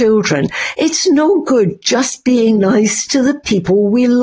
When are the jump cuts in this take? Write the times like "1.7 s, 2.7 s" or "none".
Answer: none